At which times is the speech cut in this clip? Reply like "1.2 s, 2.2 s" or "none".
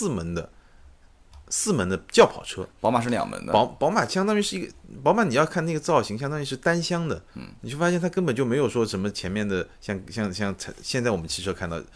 7.3 s